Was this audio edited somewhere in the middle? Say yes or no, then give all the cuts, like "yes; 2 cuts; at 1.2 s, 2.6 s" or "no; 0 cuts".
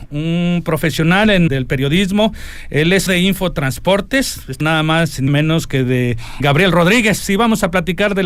yes; 5 cuts; at 1.5 s, 3.1 s, 4.6 s, 5.3 s, 6.4 s